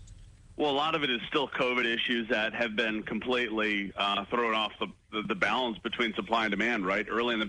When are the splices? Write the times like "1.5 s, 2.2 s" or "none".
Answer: none